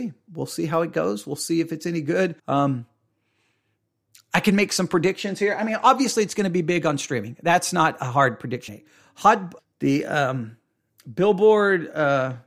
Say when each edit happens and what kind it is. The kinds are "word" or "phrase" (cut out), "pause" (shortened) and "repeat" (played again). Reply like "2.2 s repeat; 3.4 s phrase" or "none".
2.4 s pause; 8.7 s word; 9.6 s word